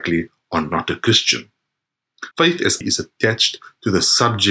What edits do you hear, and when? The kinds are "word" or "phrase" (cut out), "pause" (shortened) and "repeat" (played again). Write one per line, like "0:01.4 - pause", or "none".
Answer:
0:02.3 - pause
0:02.8 - phrase